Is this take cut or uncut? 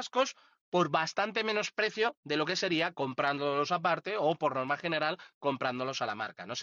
uncut